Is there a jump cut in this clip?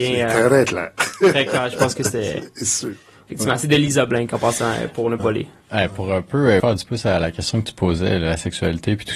yes; 2 cuts; at 5.2 s, 6.6 s

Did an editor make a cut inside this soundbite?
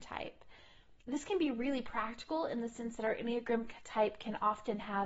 yes; 1 cut; at 1.0 s

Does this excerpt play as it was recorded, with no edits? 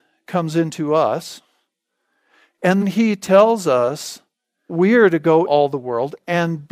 no; 3 cuts; at 2.8 s, 4.7 s, 5.5 s

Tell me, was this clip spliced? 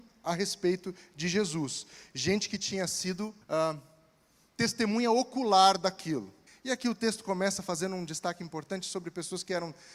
yes; 2 cuts; at 3.4 s, 6.5 s

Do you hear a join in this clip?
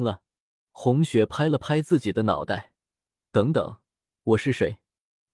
no; 0 cuts

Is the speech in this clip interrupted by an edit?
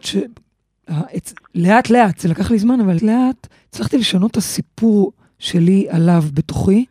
yes; 2 cuts; at 3.0 s, 3.5 s

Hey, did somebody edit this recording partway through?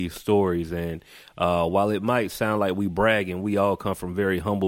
no; 0 cuts

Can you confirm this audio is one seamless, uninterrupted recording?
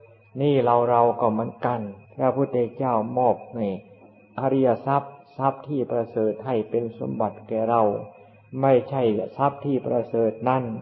no; 1 cut; at 2.1 s

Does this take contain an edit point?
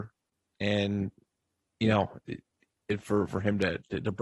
no; 0 cuts

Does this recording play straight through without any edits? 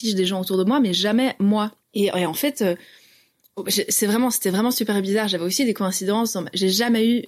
no; 1 cut; at 1.8 s

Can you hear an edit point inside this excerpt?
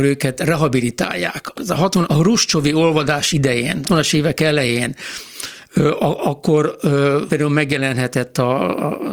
yes; 4 cuts; at 1.5 s, 2.0 s, 3.8 s, 7.3 s

